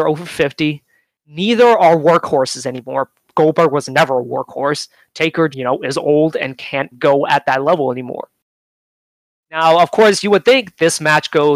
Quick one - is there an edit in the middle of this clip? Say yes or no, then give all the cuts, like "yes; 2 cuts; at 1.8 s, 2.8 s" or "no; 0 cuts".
yes; 3 cuts; at 5.5 s, 6.6 s, 6.9 s